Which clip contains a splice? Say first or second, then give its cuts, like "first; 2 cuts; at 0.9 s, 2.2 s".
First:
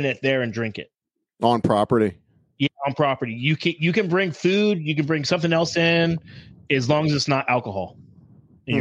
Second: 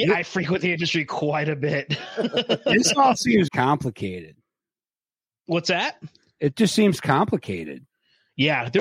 second; 1 cut; at 3.5 s